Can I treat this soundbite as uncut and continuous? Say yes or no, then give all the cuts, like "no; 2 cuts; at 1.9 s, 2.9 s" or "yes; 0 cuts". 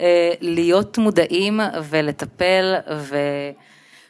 yes; 0 cuts